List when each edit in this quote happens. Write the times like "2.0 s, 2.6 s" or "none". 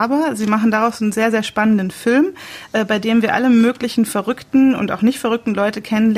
none